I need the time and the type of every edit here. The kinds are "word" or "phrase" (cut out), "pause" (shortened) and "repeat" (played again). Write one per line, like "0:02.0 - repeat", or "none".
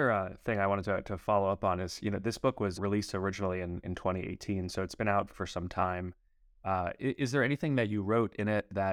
0:02.8 - word
0:05.3 - word

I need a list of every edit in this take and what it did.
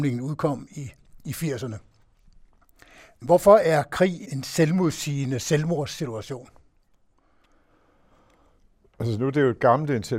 0:04.2 - word

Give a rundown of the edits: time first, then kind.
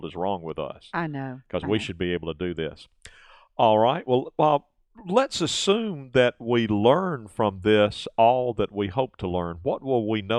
none

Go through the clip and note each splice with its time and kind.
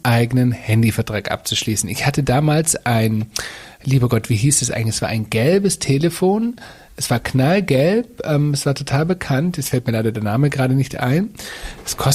none

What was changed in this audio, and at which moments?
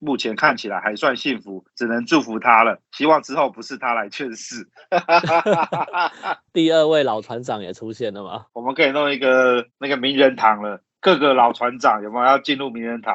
0:01.7 - pause
0:02.8 - pause
0:06.5 - word

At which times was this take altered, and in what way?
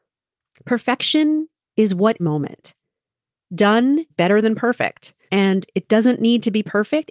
0:02.2 - phrase
0:04.1 - word
0:05.3 - pause

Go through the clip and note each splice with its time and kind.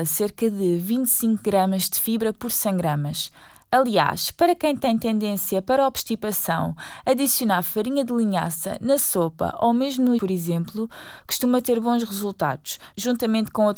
0:10.2 - word

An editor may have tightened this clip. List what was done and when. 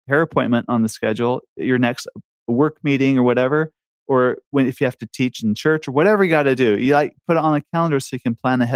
none

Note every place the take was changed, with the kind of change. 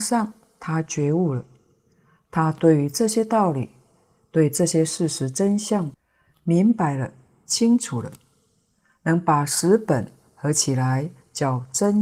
none

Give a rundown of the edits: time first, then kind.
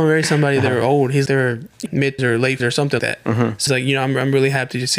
0:01.3 - word
0:01.9 - word
0:02.2 - word
0:02.6 - word
0:03.0 - word
0:03.7 - word

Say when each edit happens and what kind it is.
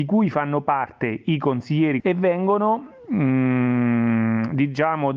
0:02.0 - word

